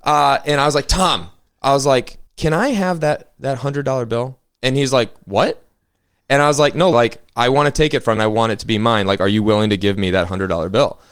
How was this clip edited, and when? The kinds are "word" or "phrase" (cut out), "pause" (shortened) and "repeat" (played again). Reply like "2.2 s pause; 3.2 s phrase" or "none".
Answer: 2.3 s pause; 6.9 s word; 8.2 s word

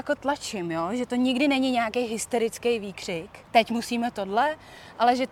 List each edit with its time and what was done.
3.4 s pause

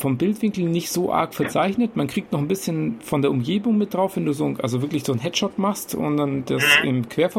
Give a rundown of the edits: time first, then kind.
none

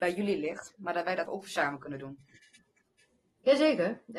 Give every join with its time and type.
1.3 s word

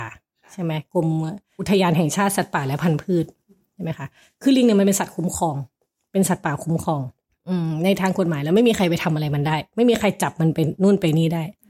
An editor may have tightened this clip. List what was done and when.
none

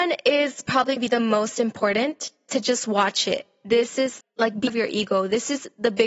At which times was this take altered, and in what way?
1.0 s word; 2.5 s word; 4.2 s word; 4.7 s word

